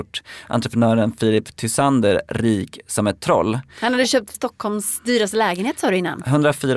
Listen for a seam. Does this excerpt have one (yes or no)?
yes